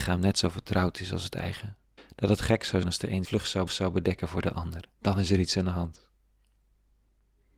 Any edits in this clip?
yes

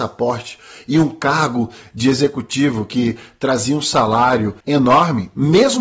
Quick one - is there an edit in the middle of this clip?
yes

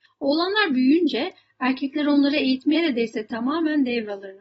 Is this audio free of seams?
no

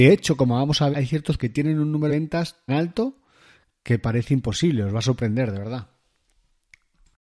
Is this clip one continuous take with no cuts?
no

